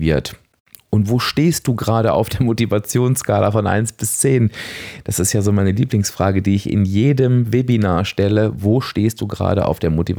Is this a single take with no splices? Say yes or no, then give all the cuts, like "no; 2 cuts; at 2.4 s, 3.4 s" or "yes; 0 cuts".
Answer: yes; 0 cuts